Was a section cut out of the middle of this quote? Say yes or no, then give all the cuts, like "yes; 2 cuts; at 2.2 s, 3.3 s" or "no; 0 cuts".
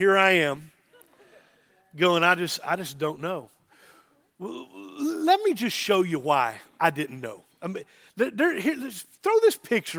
no; 0 cuts